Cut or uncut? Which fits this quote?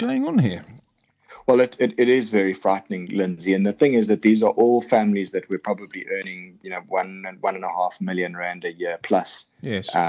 uncut